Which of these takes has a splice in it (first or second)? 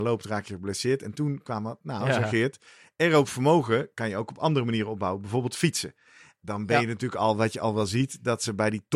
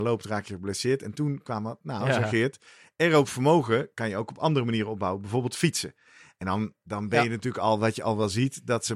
first